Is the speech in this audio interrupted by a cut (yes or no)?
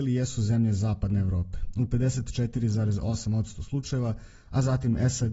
no